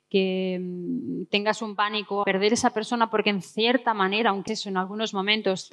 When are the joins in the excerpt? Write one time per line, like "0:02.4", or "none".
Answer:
0:02.2
0:04.5